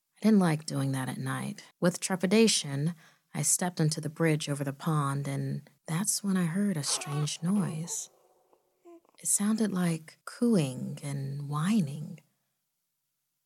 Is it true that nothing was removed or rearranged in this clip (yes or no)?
no